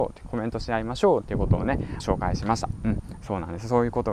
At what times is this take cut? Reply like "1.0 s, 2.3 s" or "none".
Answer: 2.0 s